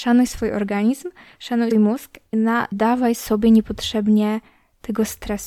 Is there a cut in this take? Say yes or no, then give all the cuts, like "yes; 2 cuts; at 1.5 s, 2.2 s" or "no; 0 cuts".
yes; 3 cuts; at 1.7 s, 2.3 s, 2.7 s